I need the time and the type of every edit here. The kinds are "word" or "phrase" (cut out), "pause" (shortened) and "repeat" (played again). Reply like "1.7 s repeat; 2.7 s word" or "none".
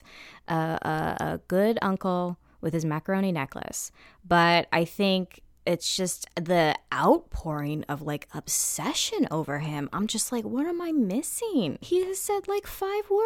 none